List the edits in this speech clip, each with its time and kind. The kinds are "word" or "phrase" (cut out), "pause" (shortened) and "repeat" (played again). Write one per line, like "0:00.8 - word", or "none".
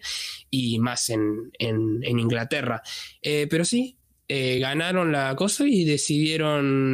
none